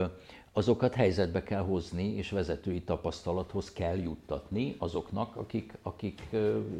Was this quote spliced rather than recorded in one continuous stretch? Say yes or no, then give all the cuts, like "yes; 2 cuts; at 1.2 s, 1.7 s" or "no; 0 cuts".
no; 0 cuts